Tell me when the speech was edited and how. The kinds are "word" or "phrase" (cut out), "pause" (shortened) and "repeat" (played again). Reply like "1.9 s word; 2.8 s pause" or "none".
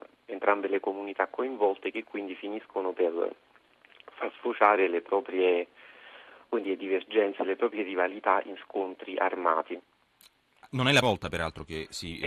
11.0 s word

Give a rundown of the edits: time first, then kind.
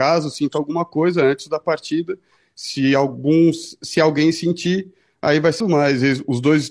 5.6 s word

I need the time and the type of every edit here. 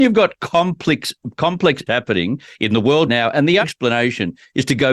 1.9 s word; 3.1 s word; 3.6 s word

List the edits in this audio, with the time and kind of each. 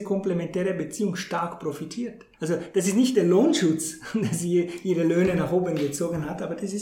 2.3 s pause

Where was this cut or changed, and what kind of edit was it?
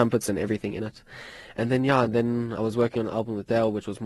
none

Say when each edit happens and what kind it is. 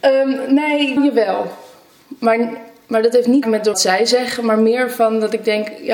1.0 s word; 3.4 s phrase; 3.7 s word

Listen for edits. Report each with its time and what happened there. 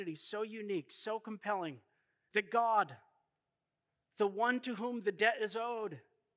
none

